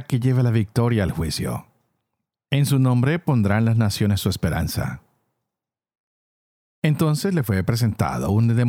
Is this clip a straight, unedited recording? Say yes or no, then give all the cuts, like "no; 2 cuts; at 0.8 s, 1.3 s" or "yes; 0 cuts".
yes; 0 cuts